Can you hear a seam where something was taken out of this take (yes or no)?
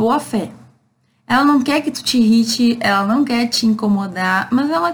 no